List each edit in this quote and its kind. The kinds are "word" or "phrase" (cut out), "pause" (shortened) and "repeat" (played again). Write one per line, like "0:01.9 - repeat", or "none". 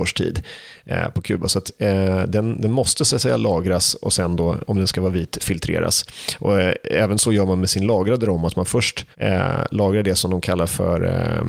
0:09.1 - pause